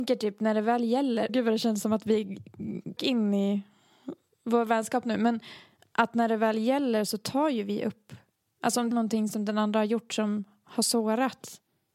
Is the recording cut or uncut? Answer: cut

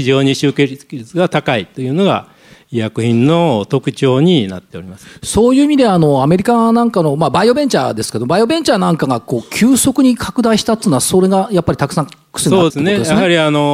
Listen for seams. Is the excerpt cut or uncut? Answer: cut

